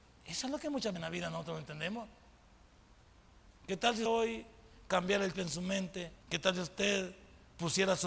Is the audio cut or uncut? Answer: cut